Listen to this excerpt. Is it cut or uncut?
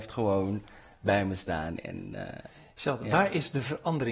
uncut